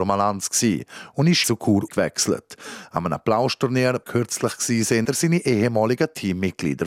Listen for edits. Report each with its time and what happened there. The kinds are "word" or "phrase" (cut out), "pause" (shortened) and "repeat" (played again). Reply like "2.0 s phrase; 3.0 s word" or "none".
1.4 s word; 1.9 s word; 4.0 s phrase; 5.0 s word